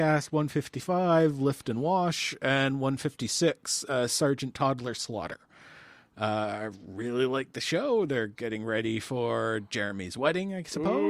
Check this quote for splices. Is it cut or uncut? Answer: uncut